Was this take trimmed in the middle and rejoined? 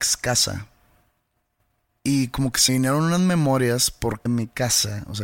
yes; 2 cuts; at 2.7 s, 4.3 s

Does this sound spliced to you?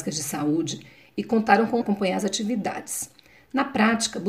yes; 1 cut; at 1.8 s

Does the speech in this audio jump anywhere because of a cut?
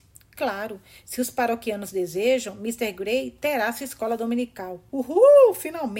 no; 0 cuts

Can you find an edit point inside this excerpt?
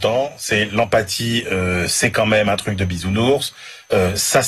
no; 0 cuts

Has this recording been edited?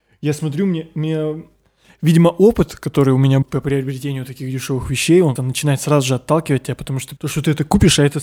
yes; 3 cuts; at 3.4 s, 5.4 s, 7.2 s

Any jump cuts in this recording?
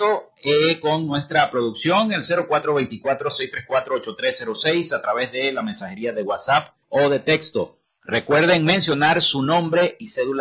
yes; 1 cut; at 6.8 s

